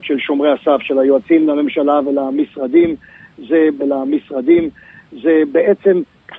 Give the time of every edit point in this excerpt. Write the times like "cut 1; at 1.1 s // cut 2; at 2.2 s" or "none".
cut 1; at 1.4 s // cut 2; at 3.8 s